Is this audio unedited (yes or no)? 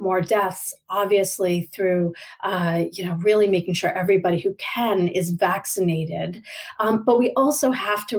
yes